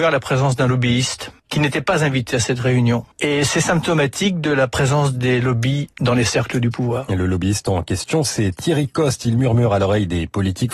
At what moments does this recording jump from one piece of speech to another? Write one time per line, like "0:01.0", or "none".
0:01.4
0:03.1
0:05.9